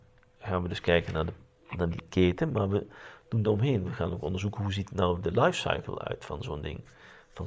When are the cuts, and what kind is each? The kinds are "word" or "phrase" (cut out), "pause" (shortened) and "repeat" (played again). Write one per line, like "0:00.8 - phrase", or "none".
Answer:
0:03.4 - phrase